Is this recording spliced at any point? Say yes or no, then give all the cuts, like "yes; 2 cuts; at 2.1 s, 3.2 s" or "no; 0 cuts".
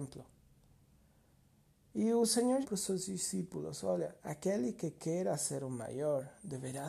yes; 2 cuts; at 2.6 s, 4.2 s